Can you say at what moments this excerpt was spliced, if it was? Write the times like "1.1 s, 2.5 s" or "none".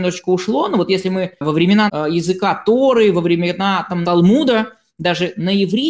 1.4 s, 1.9 s, 4.0 s